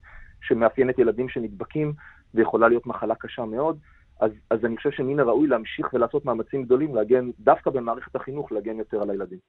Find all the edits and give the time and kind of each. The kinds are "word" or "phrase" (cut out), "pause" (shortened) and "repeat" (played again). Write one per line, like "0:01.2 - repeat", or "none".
none